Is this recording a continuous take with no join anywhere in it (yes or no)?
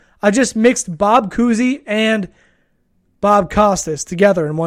yes